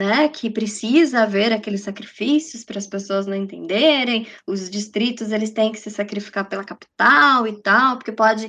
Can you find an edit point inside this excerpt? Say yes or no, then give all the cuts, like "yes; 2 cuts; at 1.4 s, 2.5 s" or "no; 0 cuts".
no; 0 cuts